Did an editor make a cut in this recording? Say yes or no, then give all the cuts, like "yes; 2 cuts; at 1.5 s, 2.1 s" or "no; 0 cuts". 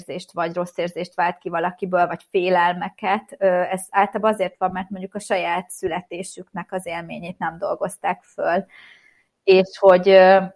no; 0 cuts